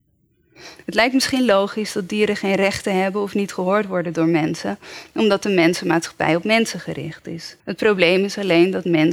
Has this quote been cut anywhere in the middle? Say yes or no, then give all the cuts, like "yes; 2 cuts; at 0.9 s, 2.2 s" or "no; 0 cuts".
yes; 1 cut; at 7.6 s